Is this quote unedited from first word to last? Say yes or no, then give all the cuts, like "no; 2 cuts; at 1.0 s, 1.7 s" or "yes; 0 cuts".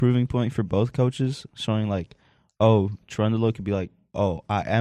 yes; 0 cuts